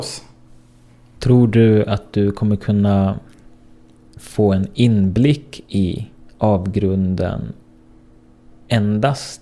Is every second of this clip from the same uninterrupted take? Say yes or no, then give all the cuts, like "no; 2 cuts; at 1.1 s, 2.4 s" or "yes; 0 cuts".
yes; 0 cuts